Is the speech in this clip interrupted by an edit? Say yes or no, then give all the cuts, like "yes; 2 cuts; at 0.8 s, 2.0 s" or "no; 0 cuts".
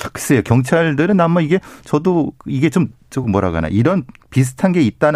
no; 0 cuts